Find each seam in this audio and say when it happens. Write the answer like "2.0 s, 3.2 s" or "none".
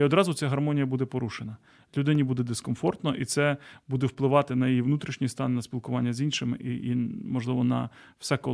none